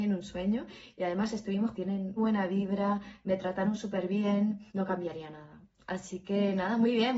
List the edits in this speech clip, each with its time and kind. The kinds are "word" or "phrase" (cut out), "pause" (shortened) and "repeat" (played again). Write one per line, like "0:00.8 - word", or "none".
0:01.7 - phrase
0:02.2 - word
0:04.7 - pause